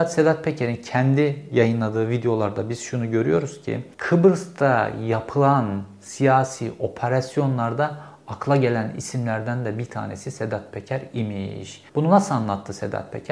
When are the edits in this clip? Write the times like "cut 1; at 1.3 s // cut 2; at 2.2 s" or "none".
cut 1; at 3.9 s // cut 2; at 11.9 s